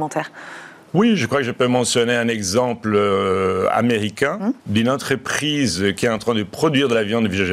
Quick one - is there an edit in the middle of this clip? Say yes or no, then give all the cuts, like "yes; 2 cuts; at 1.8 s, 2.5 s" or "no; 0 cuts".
yes; 1 cut; at 4.6 s